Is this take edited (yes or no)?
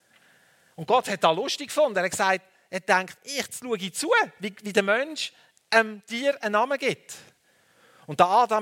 no